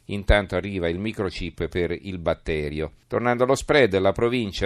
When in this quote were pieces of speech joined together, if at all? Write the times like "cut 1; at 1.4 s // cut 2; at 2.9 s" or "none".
cut 1; at 3.0 s